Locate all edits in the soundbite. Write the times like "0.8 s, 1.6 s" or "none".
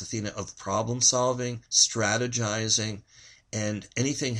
1.7 s